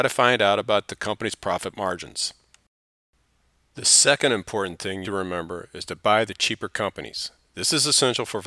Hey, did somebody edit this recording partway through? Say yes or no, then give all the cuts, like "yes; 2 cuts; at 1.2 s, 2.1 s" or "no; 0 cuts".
yes; 1 cut; at 5.0 s